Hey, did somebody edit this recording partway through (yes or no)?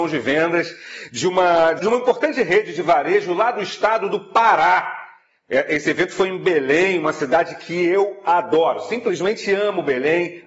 yes